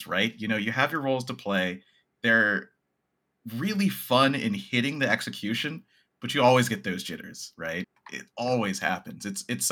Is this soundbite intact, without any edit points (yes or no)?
yes